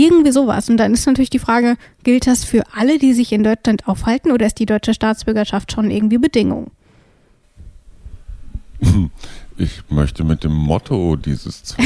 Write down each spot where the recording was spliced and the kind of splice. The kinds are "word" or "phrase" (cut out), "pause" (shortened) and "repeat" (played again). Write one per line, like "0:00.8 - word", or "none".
none